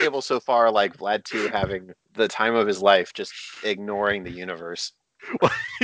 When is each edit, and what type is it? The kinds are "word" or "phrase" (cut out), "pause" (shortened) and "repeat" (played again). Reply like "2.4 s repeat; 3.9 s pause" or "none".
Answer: 2.0 s pause